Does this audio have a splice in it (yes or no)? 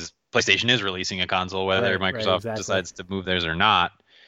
no